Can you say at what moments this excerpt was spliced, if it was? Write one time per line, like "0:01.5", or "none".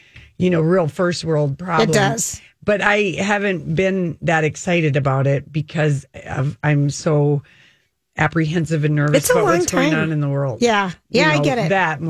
none